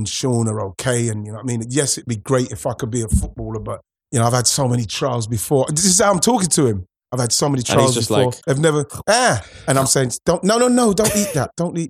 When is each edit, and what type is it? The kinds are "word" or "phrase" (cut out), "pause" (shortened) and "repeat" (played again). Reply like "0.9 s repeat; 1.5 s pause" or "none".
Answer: 4.0 s pause; 8.4 s pause